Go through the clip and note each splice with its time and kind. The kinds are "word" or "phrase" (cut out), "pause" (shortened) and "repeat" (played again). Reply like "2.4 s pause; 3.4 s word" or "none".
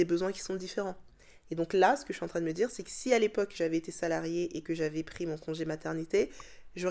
none